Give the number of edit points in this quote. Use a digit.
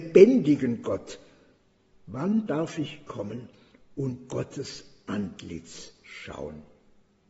0